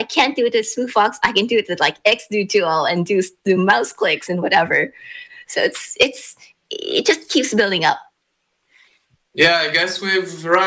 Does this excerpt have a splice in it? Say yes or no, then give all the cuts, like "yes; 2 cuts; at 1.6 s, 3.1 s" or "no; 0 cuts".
no; 0 cuts